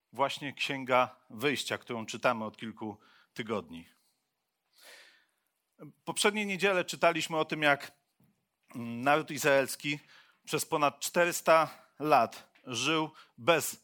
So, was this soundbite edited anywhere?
no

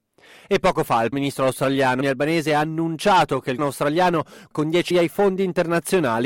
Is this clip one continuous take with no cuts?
no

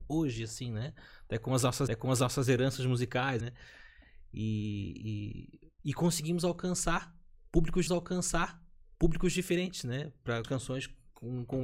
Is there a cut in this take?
yes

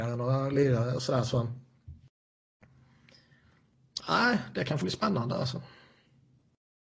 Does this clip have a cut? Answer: yes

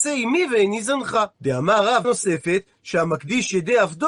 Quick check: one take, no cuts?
no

